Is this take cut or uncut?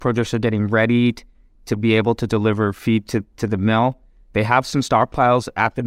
uncut